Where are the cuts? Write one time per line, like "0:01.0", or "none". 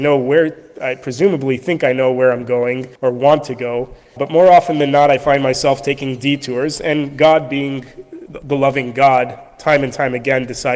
0:03.0
0:04.2